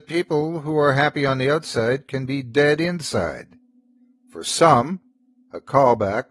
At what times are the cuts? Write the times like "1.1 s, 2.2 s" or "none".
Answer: none